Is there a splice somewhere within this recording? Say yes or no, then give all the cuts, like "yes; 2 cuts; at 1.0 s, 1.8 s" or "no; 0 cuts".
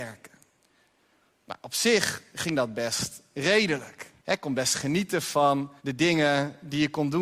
yes; 2 cuts; at 4.2 s, 5.8 s